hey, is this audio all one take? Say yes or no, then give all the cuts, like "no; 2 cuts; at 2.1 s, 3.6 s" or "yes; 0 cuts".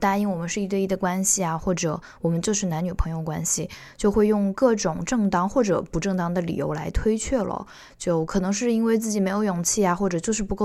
yes; 0 cuts